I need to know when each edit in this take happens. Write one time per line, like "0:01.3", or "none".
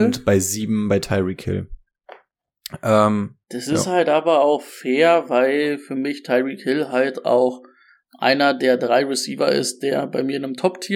0:03.4